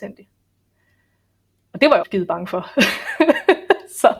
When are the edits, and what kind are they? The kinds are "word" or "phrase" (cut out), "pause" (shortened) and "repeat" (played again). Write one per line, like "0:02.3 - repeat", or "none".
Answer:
0:02.0 - word